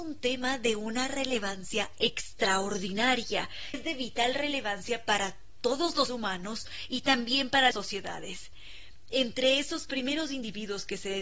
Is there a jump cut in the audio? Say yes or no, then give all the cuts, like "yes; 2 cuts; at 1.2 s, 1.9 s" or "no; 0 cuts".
yes; 3 cuts; at 3.7 s, 6.1 s, 7.7 s